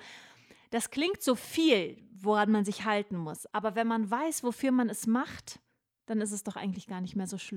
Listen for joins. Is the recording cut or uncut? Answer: uncut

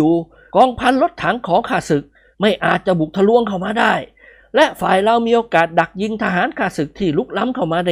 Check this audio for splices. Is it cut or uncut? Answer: uncut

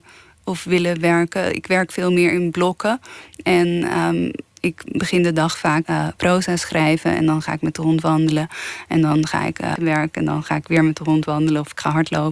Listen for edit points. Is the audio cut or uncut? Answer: cut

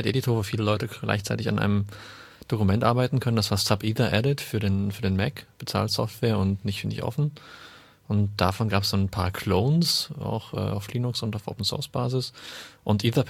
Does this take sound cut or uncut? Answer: uncut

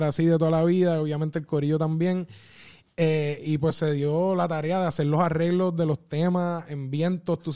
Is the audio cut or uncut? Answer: uncut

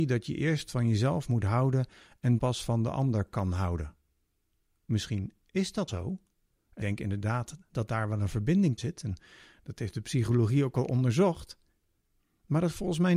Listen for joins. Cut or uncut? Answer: cut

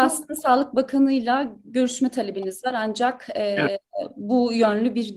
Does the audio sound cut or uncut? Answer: uncut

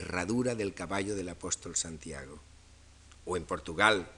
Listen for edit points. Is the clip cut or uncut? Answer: uncut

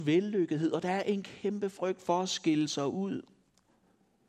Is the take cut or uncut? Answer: uncut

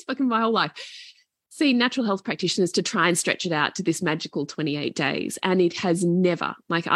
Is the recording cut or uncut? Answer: uncut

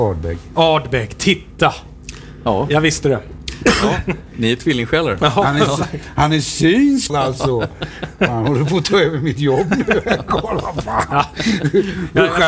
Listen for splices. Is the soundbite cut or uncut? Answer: cut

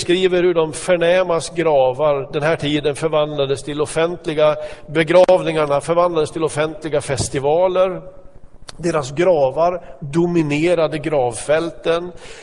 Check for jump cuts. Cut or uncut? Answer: uncut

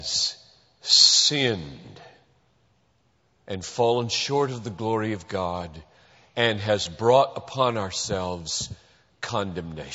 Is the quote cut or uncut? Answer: uncut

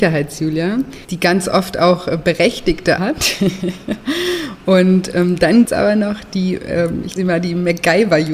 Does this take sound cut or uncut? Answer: cut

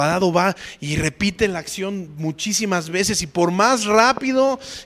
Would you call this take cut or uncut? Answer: uncut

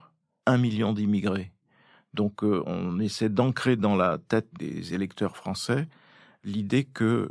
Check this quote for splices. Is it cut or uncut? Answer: uncut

